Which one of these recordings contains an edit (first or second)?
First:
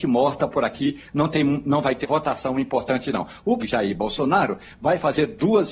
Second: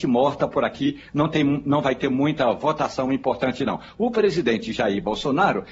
first